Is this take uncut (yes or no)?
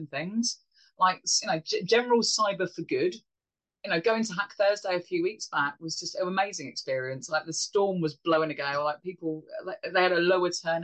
yes